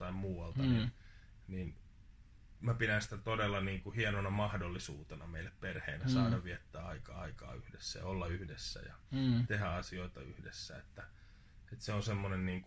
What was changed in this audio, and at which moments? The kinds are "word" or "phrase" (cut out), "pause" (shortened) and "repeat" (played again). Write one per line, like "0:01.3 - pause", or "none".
0:07.2 - repeat